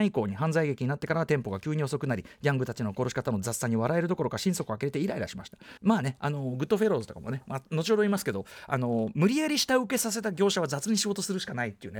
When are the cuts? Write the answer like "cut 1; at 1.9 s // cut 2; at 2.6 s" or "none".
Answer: cut 1; at 5.8 s